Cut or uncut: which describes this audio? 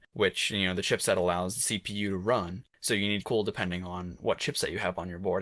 cut